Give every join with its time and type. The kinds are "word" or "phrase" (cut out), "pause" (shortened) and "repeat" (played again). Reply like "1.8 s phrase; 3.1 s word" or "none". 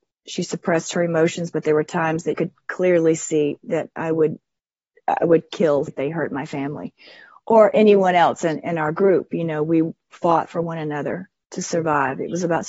2.3 s word; 5.9 s word; 8.6 s word

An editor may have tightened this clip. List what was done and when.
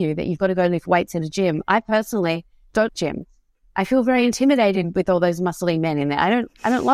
2.9 s word

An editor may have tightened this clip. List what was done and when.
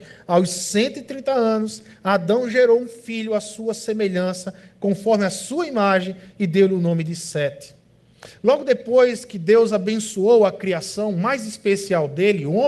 none

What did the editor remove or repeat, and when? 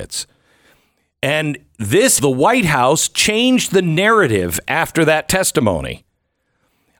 2.2 s phrase

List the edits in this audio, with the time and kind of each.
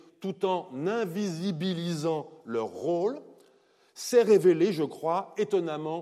none

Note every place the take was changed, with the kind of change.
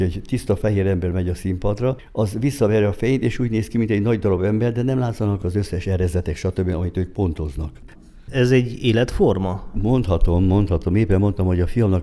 none

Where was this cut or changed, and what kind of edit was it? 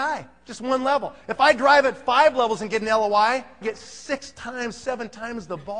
3.6 s phrase

